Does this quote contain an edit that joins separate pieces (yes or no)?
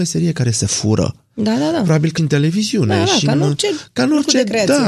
yes